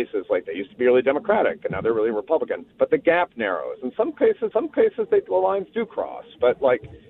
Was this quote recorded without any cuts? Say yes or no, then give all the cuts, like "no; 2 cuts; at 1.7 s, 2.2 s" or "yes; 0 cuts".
no; 2 cuts; at 2.7 s, 4.5 s